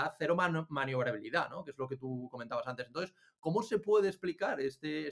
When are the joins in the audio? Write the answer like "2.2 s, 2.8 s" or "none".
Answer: none